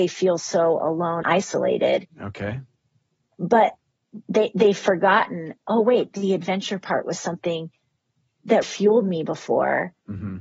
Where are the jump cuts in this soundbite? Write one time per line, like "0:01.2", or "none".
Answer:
0:01.2
0:08.6